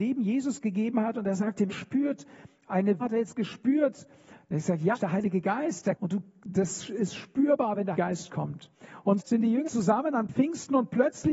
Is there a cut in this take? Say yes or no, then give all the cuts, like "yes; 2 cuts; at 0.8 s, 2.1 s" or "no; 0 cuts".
yes; 7 cuts; at 1.7 s, 3.0 s, 4.9 s, 6.0 s, 7.9 s, 9.2 s, 9.7 s